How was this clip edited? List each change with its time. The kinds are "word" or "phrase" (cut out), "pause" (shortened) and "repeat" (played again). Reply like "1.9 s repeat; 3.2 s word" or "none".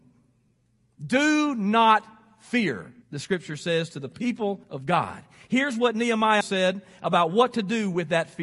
3.0 s pause; 4.6 s pause; 6.4 s word

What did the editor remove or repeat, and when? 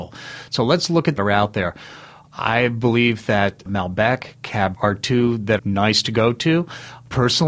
1.2 s phrase; 4.7 s word; 5.6 s word

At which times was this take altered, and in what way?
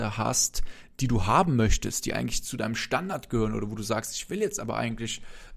none

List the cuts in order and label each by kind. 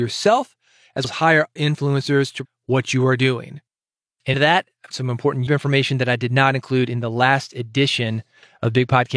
1.0 s word; 1.6 s word; 2.4 s word; 4.3 s word; 4.9 s word; 5.5 s word

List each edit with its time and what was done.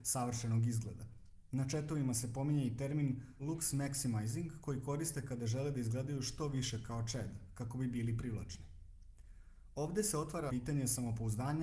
10.5 s word

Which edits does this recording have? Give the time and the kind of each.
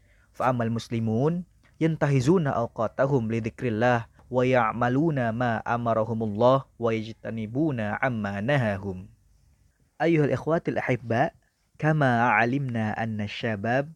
none

